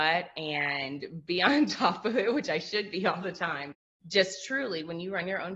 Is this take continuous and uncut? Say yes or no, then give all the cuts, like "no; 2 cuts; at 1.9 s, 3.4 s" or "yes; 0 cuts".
yes; 0 cuts